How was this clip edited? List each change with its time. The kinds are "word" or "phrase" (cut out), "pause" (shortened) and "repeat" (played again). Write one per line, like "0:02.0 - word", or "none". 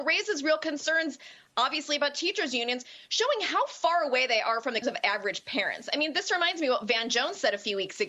0:04.8 - word